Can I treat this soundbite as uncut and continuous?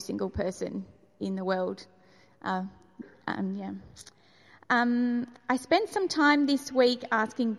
yes; 0 cuts

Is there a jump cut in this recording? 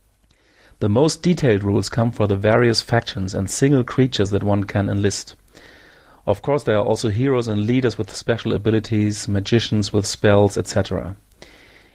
no; 0 cuts

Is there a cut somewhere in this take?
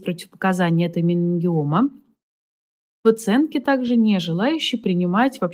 no; 0 cuts

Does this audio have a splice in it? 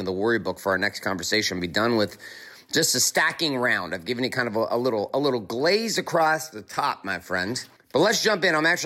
yes; 1 cut; at 7.8 s

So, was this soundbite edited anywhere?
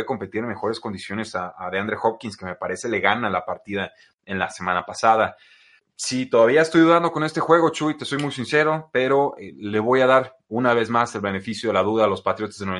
no; 0 cuts

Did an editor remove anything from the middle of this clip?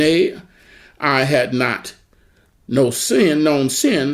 no; 0 cuts

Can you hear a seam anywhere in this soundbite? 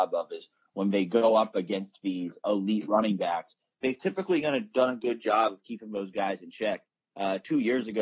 no; 0 cuts

